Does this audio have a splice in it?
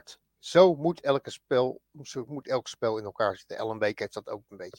no; 0 cuts

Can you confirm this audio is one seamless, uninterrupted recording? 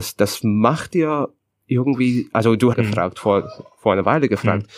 no; 1 cut; at 2.7 s

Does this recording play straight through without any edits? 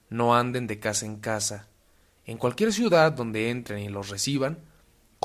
yes; 0 cuts

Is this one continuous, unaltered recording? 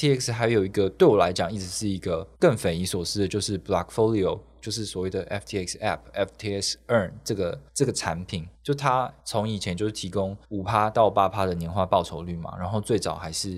no; 5 cuts; at 2.3 s, 7.7 s, 8.5 s, 9.2 s, 10.4 s

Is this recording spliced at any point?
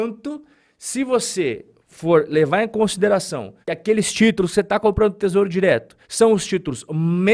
yes; 2 cuts; at 3.6 s, 6.0 s

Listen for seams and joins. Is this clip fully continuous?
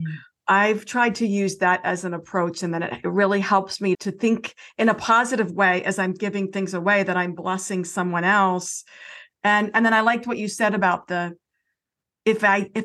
no; 1 cut; at 3.9 s

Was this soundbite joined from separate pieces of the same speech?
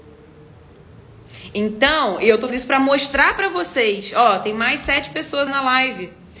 yes; 2 cuts; at 2.5 s, 5.5 s

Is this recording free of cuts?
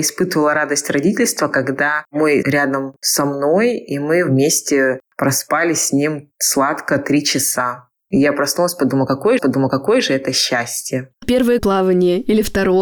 no; 4 cuts; at 2.4 s, 9.4 s, 11.2 s, 11.6 s

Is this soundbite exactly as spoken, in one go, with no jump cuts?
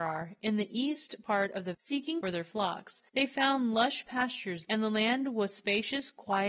no; 4 cuts; at 1.7 s, 2.2 s, 3.1 s, 4.7 s

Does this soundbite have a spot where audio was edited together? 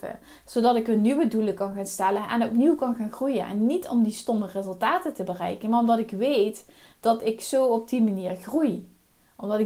no; 0 cuts

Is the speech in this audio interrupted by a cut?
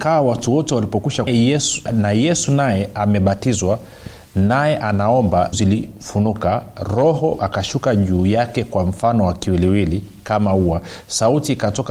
yes; 4 cuts; at 1.3 s, 1.9 s, 5.5 s, 7.4 s

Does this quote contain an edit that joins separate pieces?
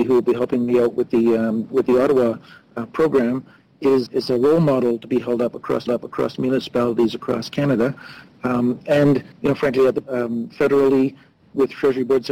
yes; 4 cuts; at 4.1 s, 5.9 s, 9.3 s, 10.0 s

